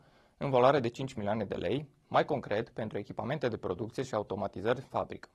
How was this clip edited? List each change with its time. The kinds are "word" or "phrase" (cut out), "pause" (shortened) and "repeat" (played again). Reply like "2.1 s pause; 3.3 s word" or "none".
none